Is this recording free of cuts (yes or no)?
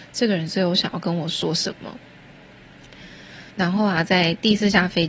no